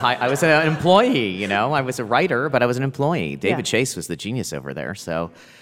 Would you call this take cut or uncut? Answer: uncut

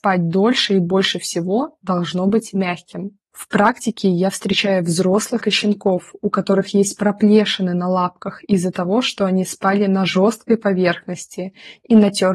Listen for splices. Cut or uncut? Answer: cut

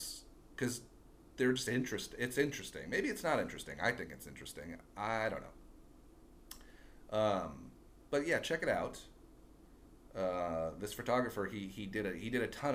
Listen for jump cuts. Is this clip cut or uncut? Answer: uncut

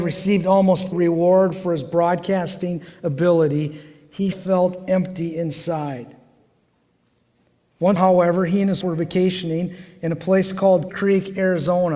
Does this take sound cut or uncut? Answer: cut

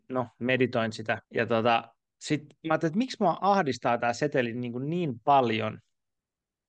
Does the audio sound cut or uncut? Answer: cut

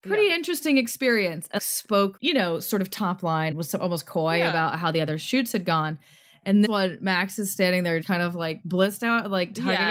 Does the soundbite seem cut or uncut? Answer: cut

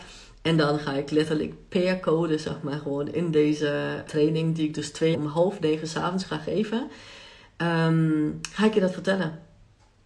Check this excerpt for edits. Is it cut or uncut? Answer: cut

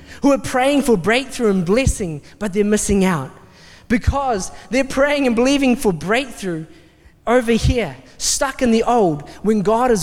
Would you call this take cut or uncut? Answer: uncut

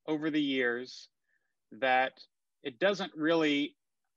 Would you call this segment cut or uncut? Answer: uncut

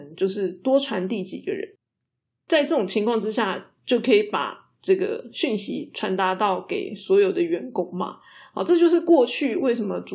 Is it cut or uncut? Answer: uncut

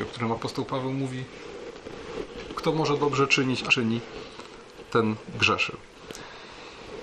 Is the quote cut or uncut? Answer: cut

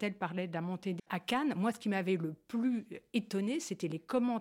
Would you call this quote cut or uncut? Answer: cut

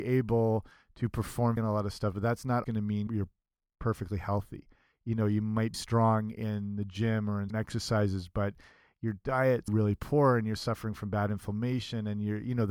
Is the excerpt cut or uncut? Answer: cut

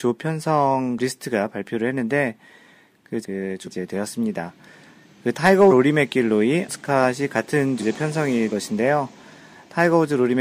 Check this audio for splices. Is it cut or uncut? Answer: cut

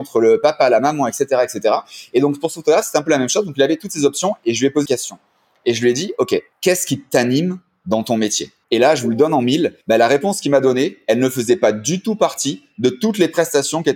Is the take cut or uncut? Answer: cut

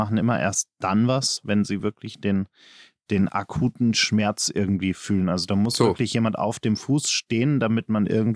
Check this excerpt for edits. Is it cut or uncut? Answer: uncut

